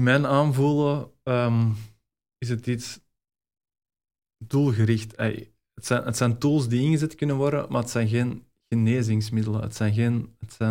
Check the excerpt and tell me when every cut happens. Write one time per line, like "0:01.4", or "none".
none